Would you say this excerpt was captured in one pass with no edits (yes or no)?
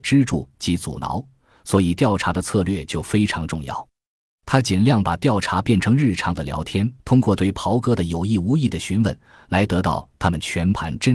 no